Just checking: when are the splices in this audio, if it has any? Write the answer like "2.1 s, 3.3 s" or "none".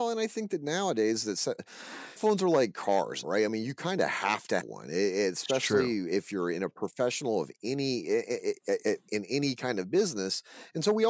2.2 s, 3.2 s, 4.6 s, 9.1 s